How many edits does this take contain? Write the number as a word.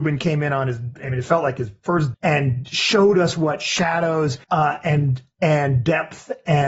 two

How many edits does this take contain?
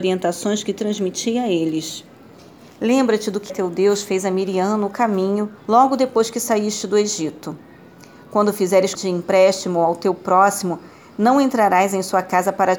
three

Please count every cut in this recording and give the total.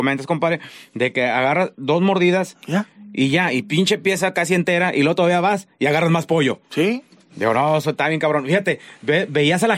zero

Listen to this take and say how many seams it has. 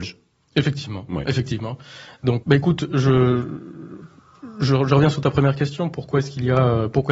one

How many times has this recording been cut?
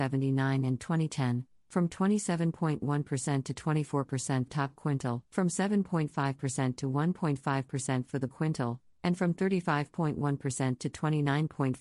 three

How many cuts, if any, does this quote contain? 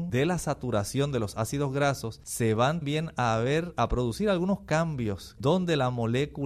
two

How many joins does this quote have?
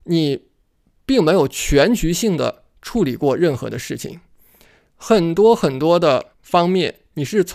one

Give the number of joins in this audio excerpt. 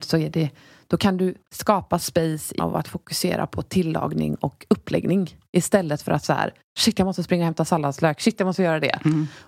two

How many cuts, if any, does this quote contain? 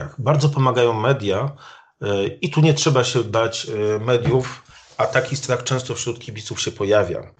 zero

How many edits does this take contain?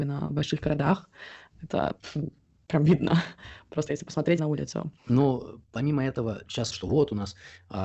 four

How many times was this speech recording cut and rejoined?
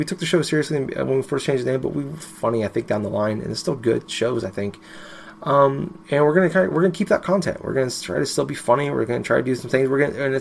two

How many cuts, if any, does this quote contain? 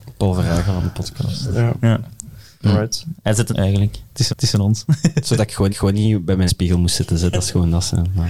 four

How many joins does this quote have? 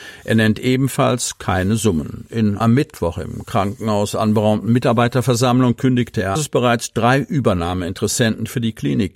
two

